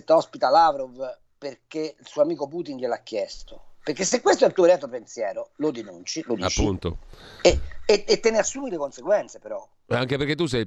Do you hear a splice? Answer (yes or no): no